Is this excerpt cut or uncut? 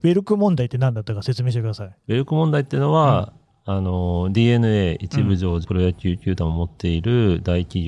cut